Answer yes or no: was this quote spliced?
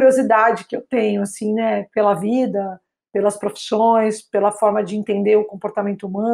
no